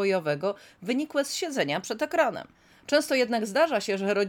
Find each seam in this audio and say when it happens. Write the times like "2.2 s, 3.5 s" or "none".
2.5 s